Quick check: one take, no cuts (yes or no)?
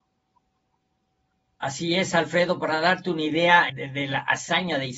no